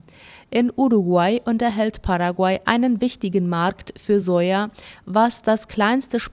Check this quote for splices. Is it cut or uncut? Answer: uncut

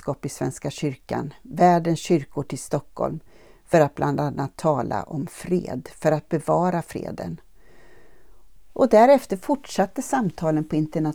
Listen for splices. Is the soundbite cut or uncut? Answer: uncut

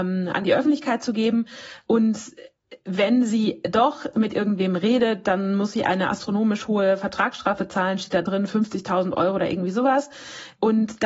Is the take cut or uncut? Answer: uncut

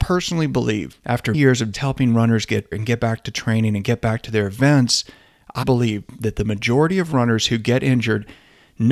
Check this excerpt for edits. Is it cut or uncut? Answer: cut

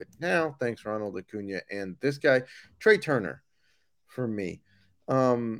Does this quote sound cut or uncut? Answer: uncut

